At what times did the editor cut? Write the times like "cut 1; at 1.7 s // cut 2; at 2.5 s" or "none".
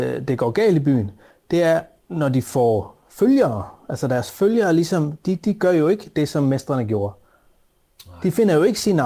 none